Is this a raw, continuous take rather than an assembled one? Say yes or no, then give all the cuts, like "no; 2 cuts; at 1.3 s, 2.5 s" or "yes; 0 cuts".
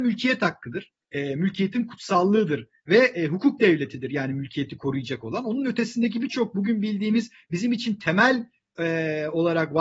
no; 1 cut; at 1.0 s